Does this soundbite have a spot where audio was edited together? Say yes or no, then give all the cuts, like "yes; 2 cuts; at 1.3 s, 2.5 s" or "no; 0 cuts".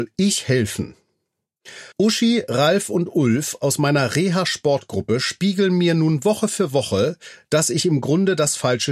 yes; 1 cut; at 1.9 s